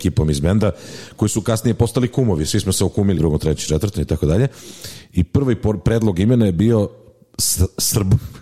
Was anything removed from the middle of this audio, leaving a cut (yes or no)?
yes